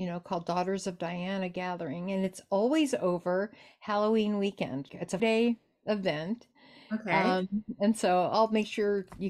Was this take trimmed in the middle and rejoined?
yes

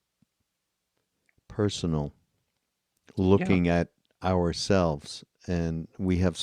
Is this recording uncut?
yes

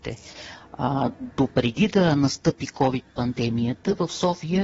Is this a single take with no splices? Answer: yes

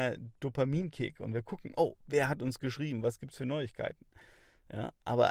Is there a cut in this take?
no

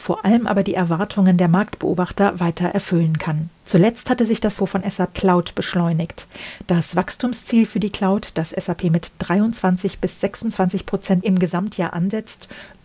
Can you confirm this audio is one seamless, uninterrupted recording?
no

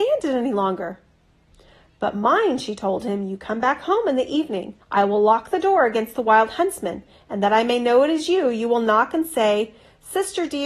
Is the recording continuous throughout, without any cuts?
no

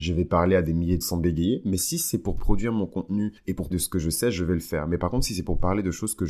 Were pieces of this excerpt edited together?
yes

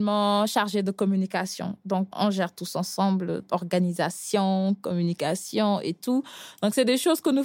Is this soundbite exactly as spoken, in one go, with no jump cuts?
no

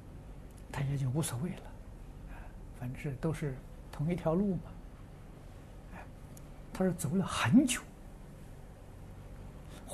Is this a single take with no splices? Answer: yes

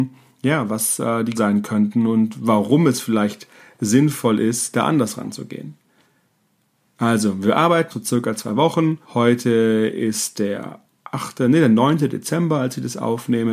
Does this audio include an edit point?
yes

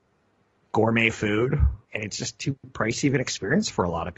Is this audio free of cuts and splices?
no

